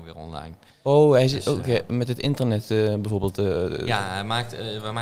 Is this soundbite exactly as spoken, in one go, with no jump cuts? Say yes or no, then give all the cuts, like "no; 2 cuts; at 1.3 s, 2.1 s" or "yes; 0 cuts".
yes; 0 cuts